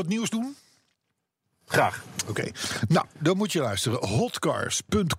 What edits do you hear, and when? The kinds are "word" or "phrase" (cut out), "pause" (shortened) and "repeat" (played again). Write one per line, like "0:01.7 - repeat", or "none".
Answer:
none

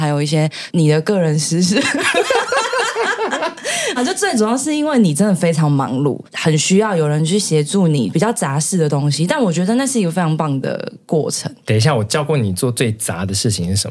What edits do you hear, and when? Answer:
0:04.0 - phrase
0:06.3 - pause

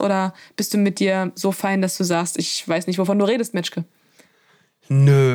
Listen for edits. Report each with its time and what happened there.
none

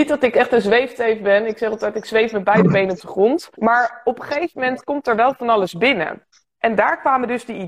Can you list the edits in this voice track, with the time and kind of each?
0:03.5 - pause
0:06.3 - pause

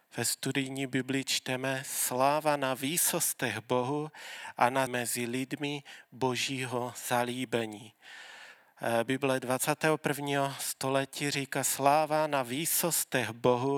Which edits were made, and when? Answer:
0:04.9 - phrase

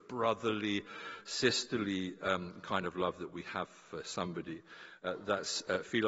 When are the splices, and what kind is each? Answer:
none

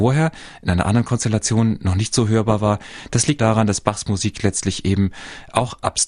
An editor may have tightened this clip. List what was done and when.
0:03.4 - word

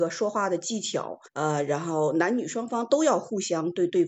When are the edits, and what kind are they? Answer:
0:01.3 - pause

